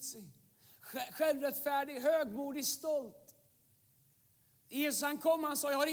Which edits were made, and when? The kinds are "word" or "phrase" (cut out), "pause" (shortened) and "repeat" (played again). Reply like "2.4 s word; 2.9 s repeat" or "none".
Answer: none